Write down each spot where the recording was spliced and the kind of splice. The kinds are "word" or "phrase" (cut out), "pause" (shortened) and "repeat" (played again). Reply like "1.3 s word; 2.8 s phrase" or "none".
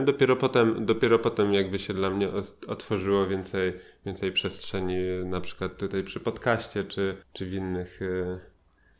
7.2 s pause